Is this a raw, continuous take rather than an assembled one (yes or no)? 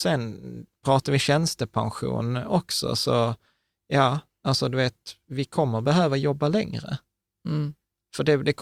yes